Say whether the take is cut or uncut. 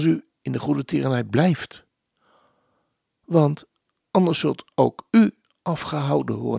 uncut